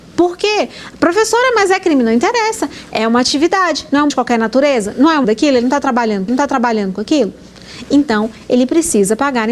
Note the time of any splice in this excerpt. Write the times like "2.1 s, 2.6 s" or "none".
4.1 s, 5.2 s, 6.3 s